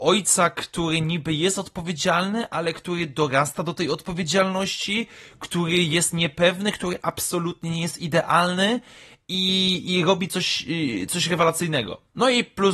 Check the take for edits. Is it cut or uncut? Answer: uncut